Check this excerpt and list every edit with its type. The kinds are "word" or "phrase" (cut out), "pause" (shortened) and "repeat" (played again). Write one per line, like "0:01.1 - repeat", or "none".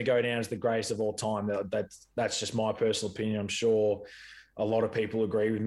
none